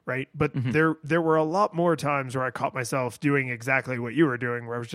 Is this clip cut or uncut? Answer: uncut